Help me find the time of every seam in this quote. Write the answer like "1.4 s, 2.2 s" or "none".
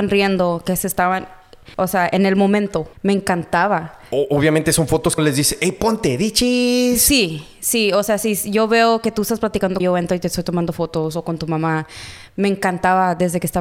1.7 s, 2.9 s, 5.2 s, 9.8 s